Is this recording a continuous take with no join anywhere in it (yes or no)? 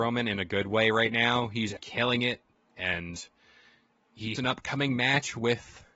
no